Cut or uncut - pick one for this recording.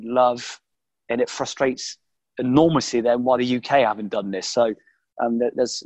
uncut